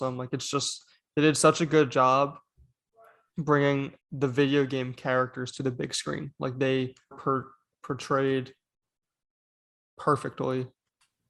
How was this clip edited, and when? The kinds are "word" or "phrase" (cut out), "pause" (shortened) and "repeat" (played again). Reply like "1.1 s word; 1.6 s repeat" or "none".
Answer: 4.0 s pause; 7.1 s word